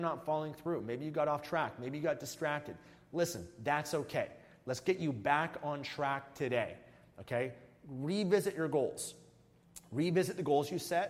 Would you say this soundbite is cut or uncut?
uncut